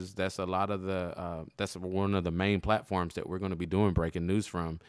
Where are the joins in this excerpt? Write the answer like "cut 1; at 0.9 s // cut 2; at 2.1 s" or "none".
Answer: none